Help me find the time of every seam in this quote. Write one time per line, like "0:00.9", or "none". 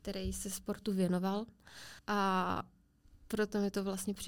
0:02.0